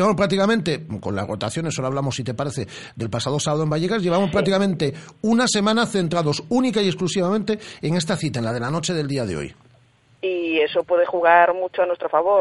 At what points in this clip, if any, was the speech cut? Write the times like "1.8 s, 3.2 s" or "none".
none